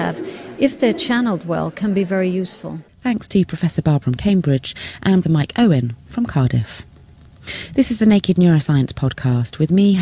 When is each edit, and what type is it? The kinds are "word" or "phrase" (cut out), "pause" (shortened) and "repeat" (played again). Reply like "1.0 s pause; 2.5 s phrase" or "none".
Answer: 2.9 s pause; 4.0 s word; 5.2 s word